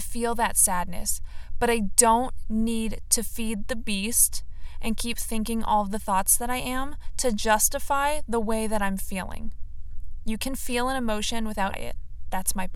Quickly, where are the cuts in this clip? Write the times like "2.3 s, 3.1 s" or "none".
11.7 s